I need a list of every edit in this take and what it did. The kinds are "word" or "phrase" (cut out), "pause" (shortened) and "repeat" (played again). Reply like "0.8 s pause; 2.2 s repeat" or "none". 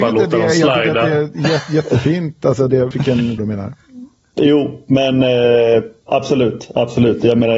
2.9 s word; 3.4 s phrase; 6.1 s word